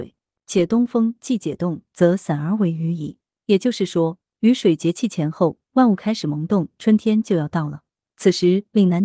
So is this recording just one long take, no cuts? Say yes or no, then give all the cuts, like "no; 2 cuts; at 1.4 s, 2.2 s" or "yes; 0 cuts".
yes; 0 cuts